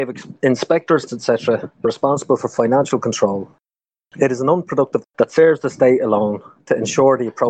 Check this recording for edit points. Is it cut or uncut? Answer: cut